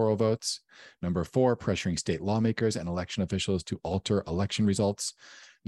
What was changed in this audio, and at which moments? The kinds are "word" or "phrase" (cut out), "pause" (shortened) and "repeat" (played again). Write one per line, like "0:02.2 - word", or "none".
none

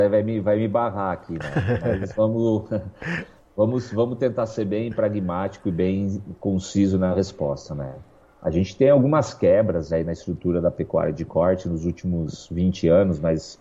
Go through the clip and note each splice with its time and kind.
none

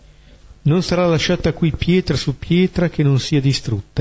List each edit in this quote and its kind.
none

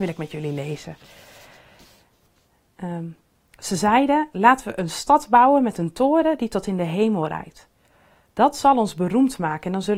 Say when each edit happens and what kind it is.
none

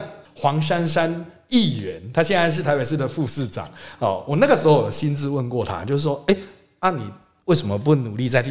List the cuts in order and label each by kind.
none

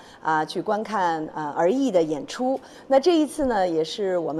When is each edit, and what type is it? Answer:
none

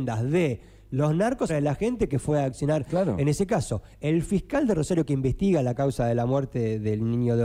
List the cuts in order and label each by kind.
0:01.5 - phrase

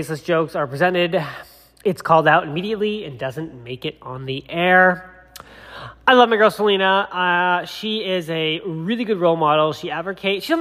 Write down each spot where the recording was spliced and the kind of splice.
none

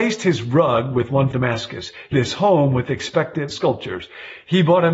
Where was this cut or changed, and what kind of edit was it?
0:01.3 - word
0:02.1 - word
0:03.5 - word

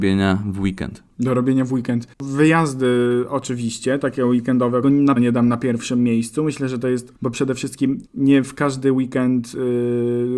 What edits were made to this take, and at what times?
0:02.1 - pause
0:04.8 - phrase
0:05.2 - word
0:07.1 - phrase
0:08.1 - pause

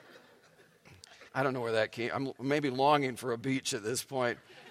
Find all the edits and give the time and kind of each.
0:01.3 - pause

